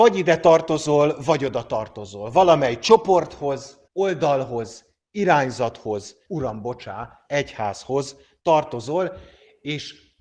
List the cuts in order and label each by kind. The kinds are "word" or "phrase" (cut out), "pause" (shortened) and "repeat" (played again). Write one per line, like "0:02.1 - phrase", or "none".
0:03.9 - pause
0:06.3 - word